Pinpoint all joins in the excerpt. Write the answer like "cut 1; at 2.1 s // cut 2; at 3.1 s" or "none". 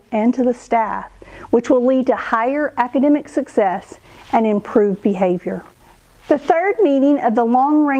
none